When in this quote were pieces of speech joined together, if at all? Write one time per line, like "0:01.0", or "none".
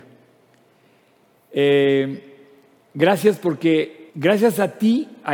0:04.1